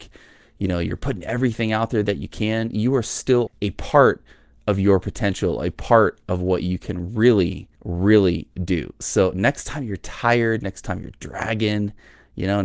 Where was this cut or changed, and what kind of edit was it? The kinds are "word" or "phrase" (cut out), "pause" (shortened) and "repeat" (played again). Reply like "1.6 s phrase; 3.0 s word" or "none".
3.5 s phrase; 7.7 s pause